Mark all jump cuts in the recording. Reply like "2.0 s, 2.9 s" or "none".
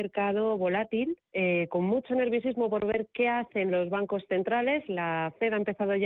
1.2 s